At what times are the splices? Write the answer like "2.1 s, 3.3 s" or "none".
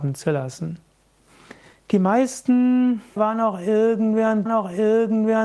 1.7 s, 3.2 s, 4.5 s